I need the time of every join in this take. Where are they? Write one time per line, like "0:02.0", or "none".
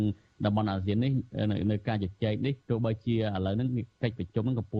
0:02.6